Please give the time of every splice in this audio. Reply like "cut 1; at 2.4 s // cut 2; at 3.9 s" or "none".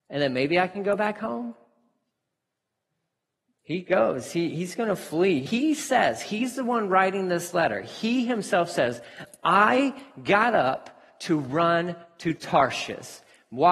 none

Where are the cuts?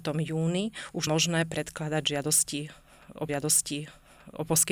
cut 1; at 1.1 s // cut 2; at 3.3 s

